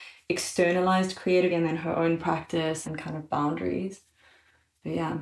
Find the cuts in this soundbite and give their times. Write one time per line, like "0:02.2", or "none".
0:01.5
0:02.8